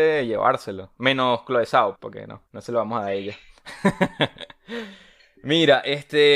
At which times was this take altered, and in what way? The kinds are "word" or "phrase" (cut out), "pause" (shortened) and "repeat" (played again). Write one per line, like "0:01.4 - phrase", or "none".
0:02.0 - word
0:02.5 - pause